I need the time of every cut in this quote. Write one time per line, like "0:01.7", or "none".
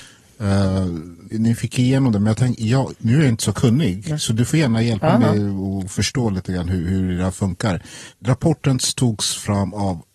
0:01.3